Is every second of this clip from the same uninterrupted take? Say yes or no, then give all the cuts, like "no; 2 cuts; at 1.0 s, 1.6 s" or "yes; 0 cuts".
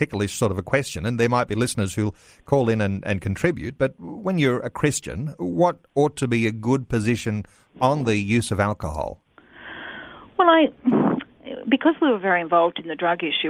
yes; 0 cuts